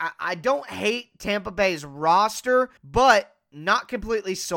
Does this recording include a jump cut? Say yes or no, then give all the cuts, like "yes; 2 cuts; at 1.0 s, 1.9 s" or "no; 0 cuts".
yes; 1 cut; at 2.8 s